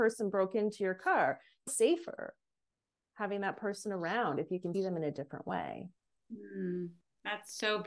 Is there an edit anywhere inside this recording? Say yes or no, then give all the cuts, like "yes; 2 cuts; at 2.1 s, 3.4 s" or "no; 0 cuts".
yes; 2 cuts; at 1.7 s, 4.7 s